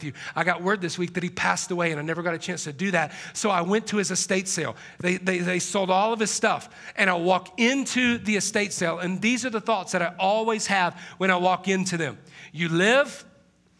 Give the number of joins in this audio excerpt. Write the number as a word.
zero